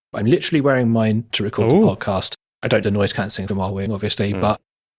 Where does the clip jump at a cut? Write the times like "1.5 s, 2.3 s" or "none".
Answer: 1.3 s, 2.8 s, 3.5 s, 3.9 s